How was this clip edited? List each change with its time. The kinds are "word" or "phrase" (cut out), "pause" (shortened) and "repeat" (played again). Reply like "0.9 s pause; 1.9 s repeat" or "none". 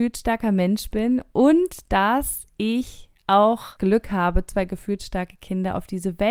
3.8 s word